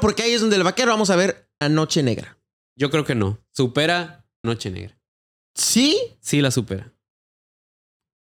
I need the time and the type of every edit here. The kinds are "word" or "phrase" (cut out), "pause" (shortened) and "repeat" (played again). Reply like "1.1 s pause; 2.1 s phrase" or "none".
1.6 s word; 4.4 s word